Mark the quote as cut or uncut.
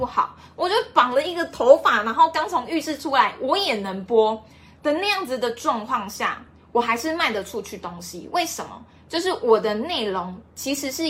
uncut